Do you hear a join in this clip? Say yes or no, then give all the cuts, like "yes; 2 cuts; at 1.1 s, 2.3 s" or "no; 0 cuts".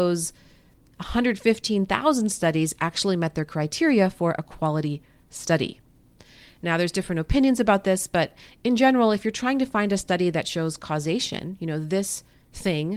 no; 0 cuts